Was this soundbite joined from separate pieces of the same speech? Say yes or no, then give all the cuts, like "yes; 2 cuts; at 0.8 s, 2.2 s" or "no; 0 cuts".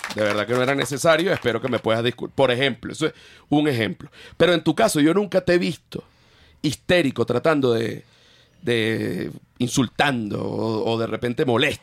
no; 0 cuts